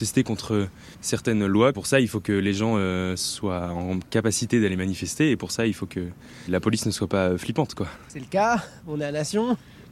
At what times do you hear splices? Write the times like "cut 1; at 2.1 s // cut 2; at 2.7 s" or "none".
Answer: cut 1; at 0.9 s